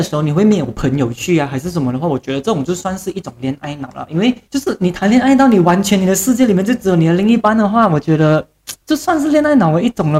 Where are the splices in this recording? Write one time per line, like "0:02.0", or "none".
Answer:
0:08.8